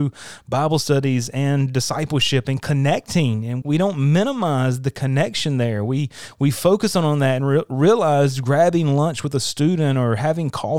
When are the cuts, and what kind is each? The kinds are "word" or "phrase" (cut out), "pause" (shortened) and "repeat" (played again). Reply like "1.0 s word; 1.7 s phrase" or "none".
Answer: 3.6 s word

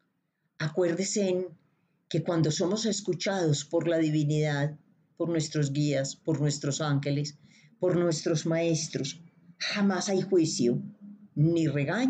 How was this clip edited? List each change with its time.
none

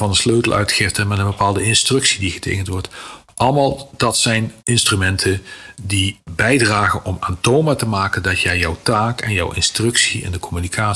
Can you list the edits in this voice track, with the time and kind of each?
4.6 s pause

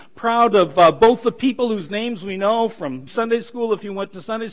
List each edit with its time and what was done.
3.1 s word

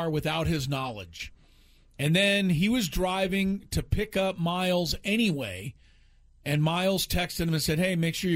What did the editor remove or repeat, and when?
none

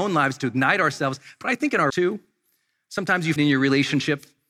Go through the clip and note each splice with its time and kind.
1.9 s word; 3.4 s word

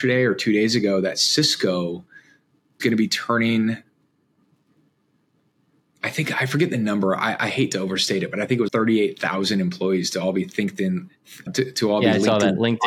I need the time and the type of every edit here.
2.8 s word; 8.7 s word; 11.5 s word

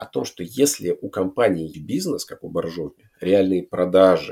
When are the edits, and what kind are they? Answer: 1.7 s phrase

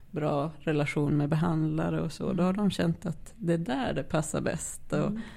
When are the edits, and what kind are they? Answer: none

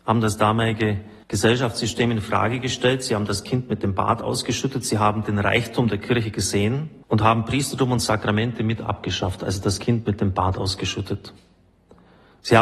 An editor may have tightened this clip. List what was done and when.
1.2 s pause; 7.0 s pause

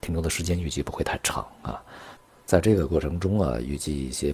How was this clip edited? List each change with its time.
none

